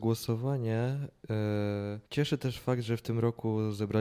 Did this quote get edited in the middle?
yes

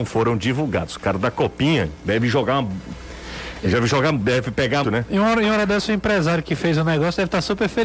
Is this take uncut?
no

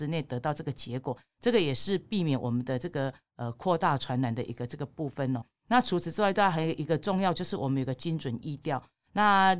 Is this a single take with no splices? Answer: no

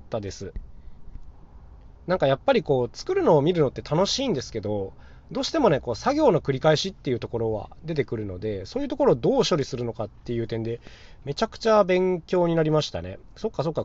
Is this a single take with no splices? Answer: yes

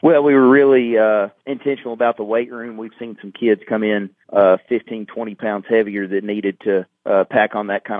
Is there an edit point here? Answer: yes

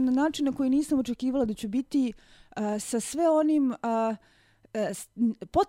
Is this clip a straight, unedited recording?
yes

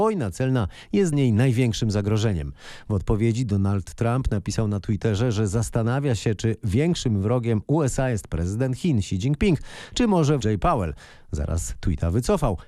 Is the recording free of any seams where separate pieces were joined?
no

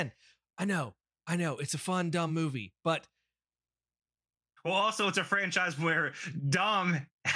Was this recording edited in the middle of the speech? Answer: no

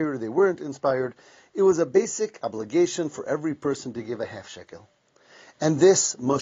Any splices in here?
no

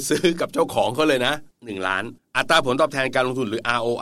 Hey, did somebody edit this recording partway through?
yes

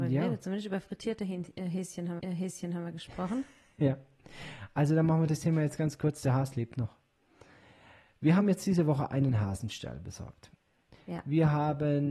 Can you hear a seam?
yes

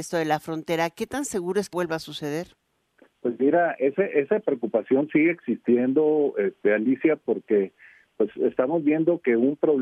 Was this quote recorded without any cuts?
no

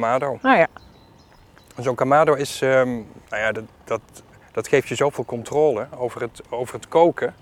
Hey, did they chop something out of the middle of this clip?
yes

